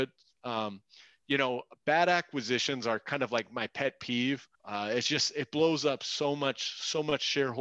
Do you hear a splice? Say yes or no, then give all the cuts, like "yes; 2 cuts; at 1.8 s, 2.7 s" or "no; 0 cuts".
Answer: yes; 1 cut; at 4.5 s